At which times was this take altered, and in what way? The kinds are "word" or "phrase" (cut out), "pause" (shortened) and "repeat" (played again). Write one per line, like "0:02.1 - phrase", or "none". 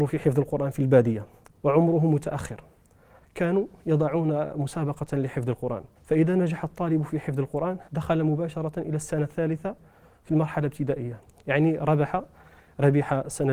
0:06.0 - pause
0:07.9 - pause